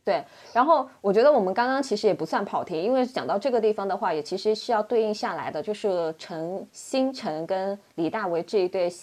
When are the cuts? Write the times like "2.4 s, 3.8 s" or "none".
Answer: 6.7 s